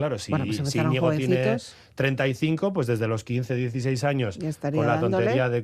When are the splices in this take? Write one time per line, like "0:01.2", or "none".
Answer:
none